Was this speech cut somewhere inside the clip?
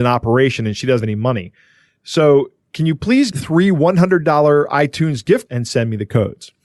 yes; 3 cuts; at 1.0 s, 3.3 s, 5.5 s

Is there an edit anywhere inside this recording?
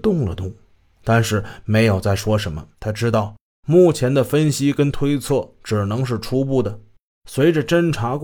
yes; 1 cut; at 2.7 s

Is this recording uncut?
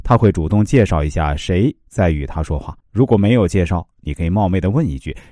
no; 1 cut; at 2.8 s

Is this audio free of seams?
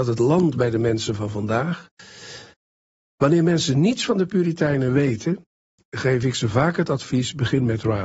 yes; 0 cuts

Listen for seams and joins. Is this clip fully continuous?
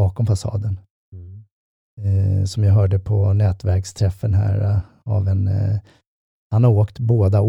yes; 0 cuts

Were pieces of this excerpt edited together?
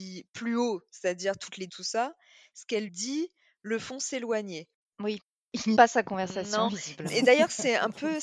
yes; 3 cuts; at 1.7 s, 2.9 s, 5.8 s

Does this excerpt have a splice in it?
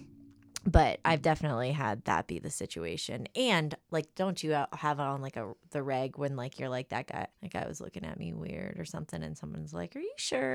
yes; 1 cut; at 7.3 s

